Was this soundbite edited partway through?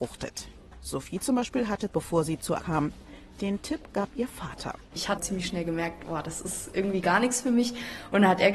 yes; 2 cuts; at 1.9 s, 2.6 s

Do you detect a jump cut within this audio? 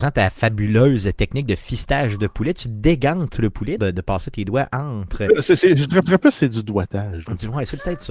yes; 2 cuts; at 3.8 s, 6.0 s

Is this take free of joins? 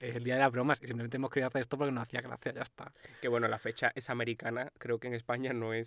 yes; 0 cuts

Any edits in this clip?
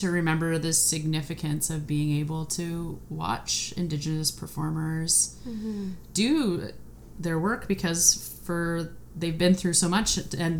no; 0 cuts

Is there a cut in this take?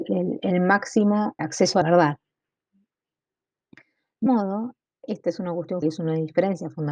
yes; 4 cuts; at 1.4 s, 1.8 s, 4.3 s, 5.8 s

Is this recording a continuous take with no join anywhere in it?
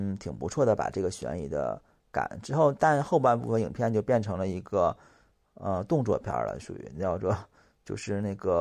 yes; 0 cuts

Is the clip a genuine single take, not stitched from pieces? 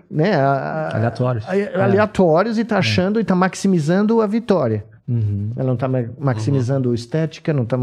yes; 0 cuts

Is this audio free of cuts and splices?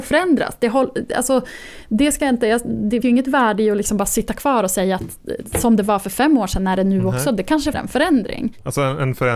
no; 2 cuts; at 3.0 s, 7.7 s

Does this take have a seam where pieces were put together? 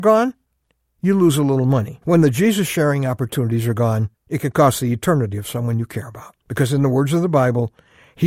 yes; 3 cuts; at 2.0 s, 4.2 s, 6.4 s

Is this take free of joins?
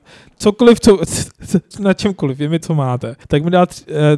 no; 3 cuts; at 1.7 s, 2.6 s, 3.2 s

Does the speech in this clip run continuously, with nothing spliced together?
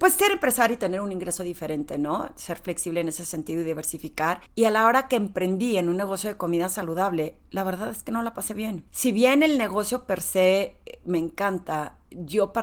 no; 2 cuts; at 4.4 s, 8.9 s

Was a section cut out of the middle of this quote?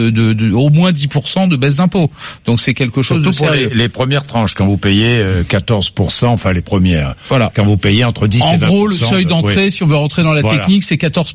no; 0 cuts

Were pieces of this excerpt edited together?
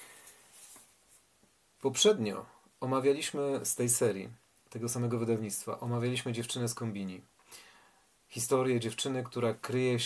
no; 0 cuts

